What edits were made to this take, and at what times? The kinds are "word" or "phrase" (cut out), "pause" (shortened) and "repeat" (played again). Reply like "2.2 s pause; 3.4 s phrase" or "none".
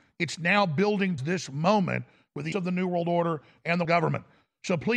1.2 s word; 2.5 s word; 3.8 s word